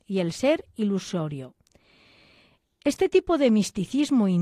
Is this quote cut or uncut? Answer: uncut